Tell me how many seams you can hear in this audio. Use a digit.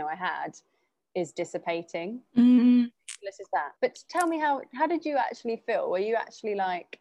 1